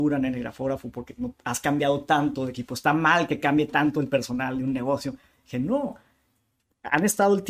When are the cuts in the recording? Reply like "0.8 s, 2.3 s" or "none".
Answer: none